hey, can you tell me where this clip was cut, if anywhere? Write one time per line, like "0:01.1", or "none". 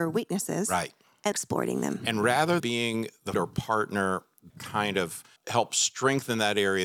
0:01.3
0:02.6
0:03.3
0:04.5
0:05.4